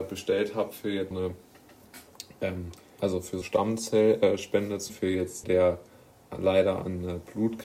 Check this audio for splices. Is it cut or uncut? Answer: cut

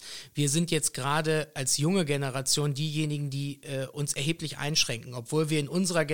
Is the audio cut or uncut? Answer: uncut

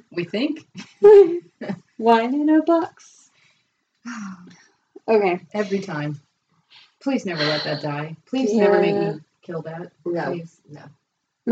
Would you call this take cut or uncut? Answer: uncut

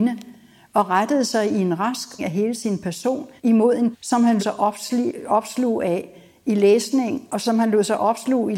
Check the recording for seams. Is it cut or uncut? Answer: cut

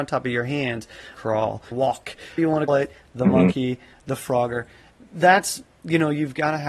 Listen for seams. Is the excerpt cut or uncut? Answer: cut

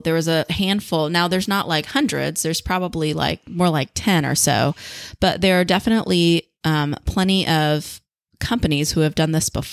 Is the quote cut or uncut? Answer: uncut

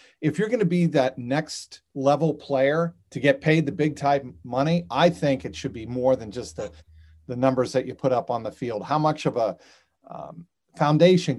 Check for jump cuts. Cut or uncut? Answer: uncut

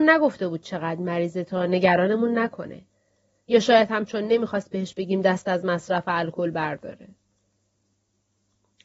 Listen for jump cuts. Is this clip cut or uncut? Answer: uncut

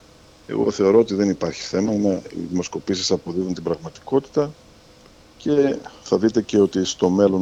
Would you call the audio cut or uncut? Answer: uncut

